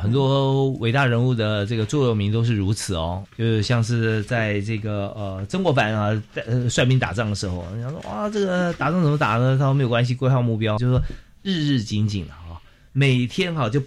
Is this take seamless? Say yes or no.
no